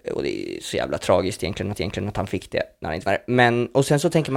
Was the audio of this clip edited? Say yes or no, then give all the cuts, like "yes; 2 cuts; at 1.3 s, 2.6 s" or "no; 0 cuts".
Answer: yes; 2 cuts; at 1.7 s, 3.1 s